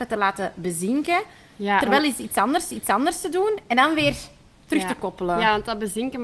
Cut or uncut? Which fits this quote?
cut